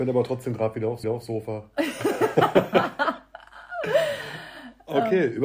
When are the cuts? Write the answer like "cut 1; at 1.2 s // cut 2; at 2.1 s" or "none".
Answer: cut 1; at 1.0 s